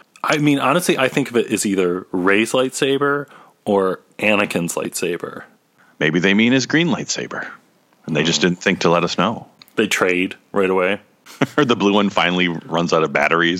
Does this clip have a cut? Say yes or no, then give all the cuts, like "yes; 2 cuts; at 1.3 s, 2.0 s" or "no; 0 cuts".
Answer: no; 0 cuts